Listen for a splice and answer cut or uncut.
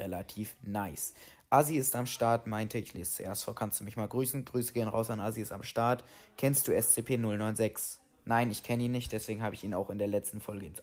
uncut